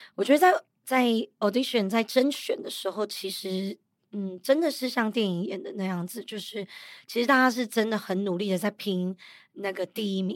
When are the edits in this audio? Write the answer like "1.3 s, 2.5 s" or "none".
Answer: none